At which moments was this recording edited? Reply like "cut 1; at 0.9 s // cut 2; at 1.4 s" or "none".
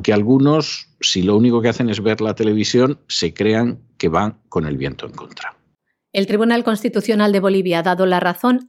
none